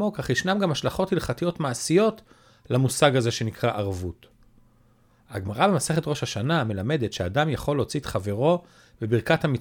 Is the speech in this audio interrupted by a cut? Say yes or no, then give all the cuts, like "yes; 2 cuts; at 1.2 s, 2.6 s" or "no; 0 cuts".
no; 0 cuts